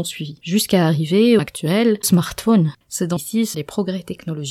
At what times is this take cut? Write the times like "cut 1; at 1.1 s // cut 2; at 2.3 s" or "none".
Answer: cut 1; at 1.4 s // cut 2; at 2.0 s // cut 3; at 3.2 s // cut 4; at 3.5 s